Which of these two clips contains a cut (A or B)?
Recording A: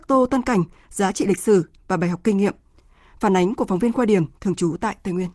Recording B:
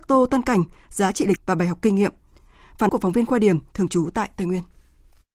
B